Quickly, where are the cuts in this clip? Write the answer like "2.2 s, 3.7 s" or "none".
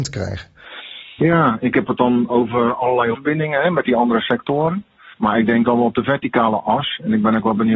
1.6 s, 2.3 s, 3.1 s, 5.1 s, 5.7 s